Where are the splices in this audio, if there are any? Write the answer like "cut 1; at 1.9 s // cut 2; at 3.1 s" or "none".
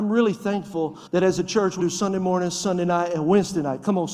cut 1; at 1.1 s // cut 2; at 1.8 s